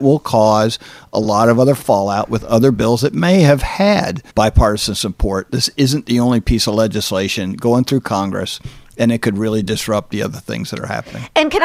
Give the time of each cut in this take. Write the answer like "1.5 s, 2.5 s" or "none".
4.3 s